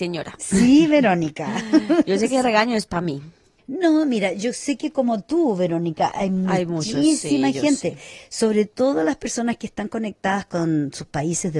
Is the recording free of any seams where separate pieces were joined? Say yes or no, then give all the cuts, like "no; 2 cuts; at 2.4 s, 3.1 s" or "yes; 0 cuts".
yes; 0 cuts